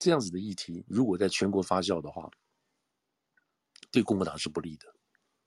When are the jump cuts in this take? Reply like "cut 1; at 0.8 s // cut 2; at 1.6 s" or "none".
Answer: none